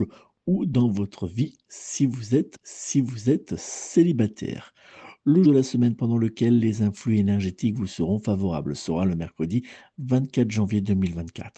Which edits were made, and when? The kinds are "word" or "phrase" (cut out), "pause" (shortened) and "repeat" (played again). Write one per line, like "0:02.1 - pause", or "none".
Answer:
0:02.5 - repeat
0:05.4 - word

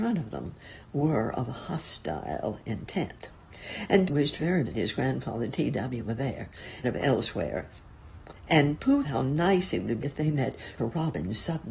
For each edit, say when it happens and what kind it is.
0:04.1 - word
0:04.6 - word
0:06.8 - word
0:09.0 - word
0:10.0 - word
0:10.8 - word

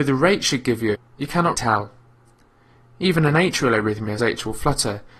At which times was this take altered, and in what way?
0:00.9 - phrase
0:01.5 - word
0:04.2 - phrase

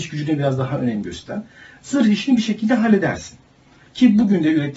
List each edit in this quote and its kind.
none

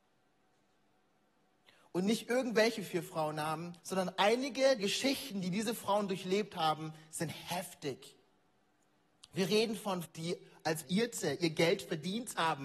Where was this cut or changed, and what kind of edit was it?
0:03.8 - pause
0:04.8 - word
0:08.7 - pause
0:10.0 - word
0:10.8 - phrase

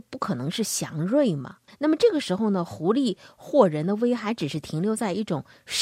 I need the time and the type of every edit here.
0:01.7 - pause

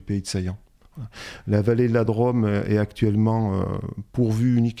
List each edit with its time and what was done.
none

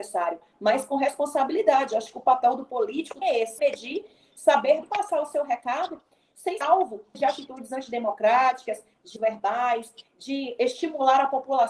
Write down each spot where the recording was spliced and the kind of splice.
0:03.2 - word
0:03.6 - word
0:04.8 - word
0:06.6 - word
0:07.1 - word
0:09.2 - word

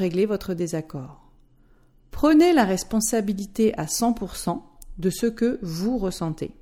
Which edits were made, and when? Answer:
none

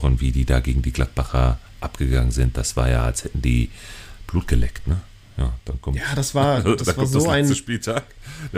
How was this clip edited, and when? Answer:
none

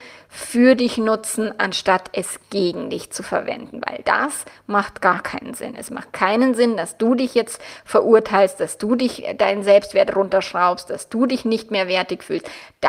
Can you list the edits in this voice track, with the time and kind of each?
none

